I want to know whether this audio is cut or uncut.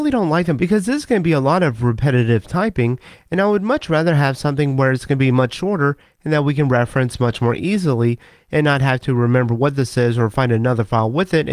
uncut